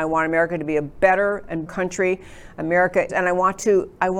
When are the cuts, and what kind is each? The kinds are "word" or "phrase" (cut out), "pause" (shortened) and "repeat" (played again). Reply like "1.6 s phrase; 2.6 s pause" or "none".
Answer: 1.7 s word; 3.1 s word

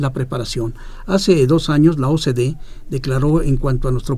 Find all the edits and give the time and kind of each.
none

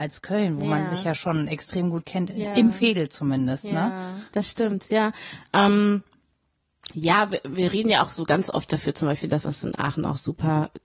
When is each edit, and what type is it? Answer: 4.3 s pause

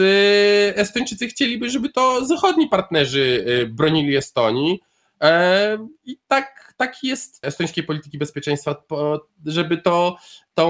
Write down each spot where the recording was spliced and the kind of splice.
7.4 s word

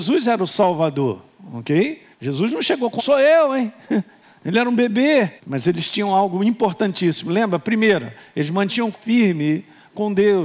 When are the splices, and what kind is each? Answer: 2.1 s pause; 3.0 s phrase; 4.2 s pause; 5.4 s pause; 8.9 s word

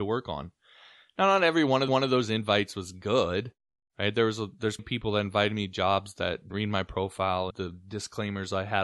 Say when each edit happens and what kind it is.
1.9 s repeat; 4.8 s word; 6.5 s word; 7.5 s word

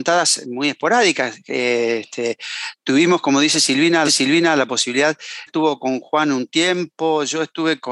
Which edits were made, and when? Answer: 4.0 s repeat; 5.5 s word

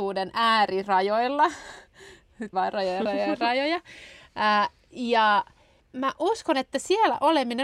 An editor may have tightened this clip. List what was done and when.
2.5 s word; 5.8 s word

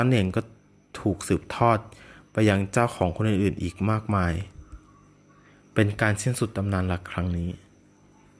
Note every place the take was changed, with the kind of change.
none

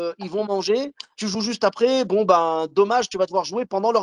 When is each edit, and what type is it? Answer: none

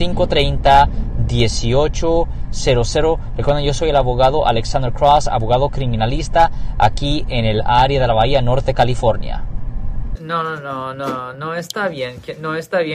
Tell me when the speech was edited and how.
none

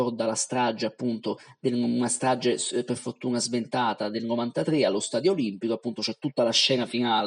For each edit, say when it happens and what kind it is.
none

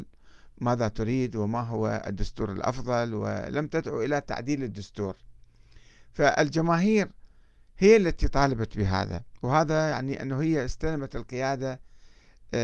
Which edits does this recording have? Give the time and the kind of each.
none

